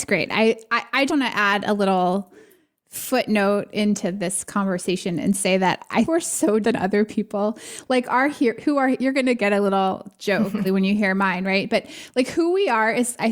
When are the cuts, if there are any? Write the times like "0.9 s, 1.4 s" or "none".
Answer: 1.1 s, 6.1 s, 6.6 s, 10.6 s